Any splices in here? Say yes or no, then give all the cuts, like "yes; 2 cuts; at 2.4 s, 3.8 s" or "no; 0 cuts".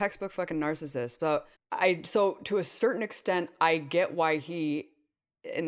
yes; 1 cut; at 1.5 s